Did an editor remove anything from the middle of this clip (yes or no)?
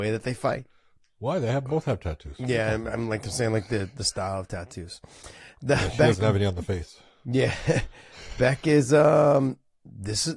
no